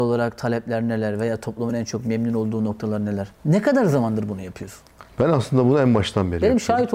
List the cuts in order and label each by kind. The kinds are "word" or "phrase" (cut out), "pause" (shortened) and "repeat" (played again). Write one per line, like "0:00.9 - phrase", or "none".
none